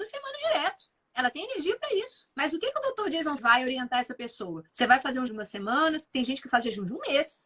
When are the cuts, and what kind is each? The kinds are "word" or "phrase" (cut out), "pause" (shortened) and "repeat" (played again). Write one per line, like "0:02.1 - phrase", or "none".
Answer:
0:01.0 - pause
0:02.3 - pause
0:03.4 - word
0:04.7 - pause
0:05.3 - word